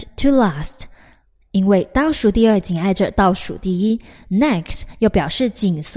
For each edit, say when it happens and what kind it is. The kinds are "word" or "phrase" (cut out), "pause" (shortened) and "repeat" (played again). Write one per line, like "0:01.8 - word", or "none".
none